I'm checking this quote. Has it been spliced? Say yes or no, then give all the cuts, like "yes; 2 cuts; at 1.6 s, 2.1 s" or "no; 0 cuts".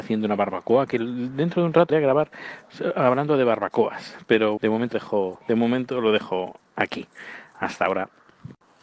yes; 3 cuts; at 1.9 s, 4.6 s, 4.9 s